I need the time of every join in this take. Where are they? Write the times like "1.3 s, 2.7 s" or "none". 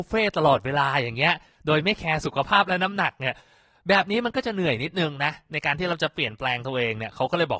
none